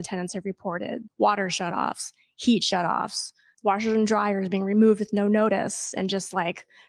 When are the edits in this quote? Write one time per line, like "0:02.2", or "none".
0:03.5